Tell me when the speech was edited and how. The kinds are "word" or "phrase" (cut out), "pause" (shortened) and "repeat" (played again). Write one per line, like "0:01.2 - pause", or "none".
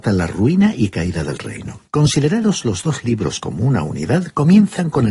0:01.9 - pause